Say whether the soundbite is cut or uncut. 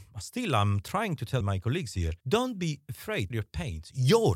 cut